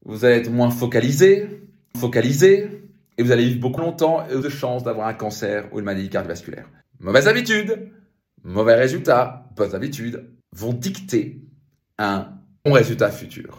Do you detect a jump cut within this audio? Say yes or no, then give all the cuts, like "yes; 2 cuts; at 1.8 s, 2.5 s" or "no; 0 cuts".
yes; 6 cuts; at 1.9 s, 3.8 s, 4.4 s, 6.8 s, 10.4 s, 12.7 s